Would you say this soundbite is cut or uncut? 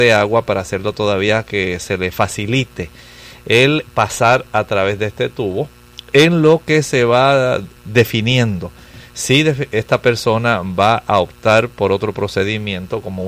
cut